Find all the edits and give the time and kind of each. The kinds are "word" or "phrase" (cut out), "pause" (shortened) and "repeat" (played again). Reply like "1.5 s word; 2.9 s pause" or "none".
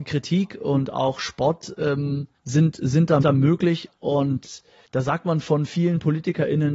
2.4 s pause; 3.2 s word; 4.8 s pause

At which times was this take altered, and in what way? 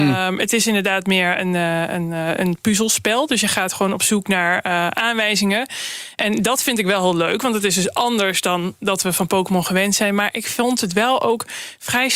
none

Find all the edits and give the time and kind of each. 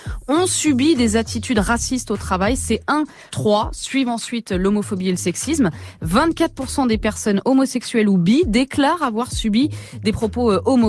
3.3 s word

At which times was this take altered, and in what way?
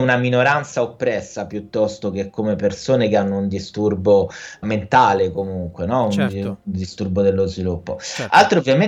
4.6 s word

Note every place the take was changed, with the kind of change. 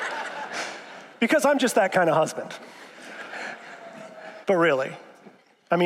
4.4 s pause

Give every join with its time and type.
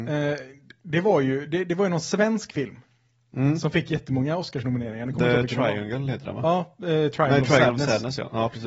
none

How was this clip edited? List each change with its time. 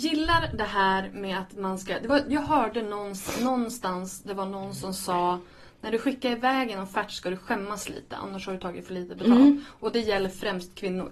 none

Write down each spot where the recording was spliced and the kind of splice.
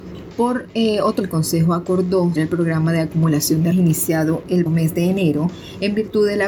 1.2 s word; 2.4 s word; 3.7 s word; 4.7 s word

